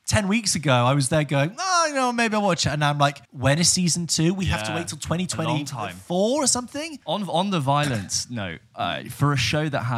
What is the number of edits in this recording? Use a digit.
2